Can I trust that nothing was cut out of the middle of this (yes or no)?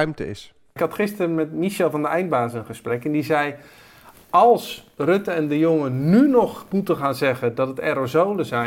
yes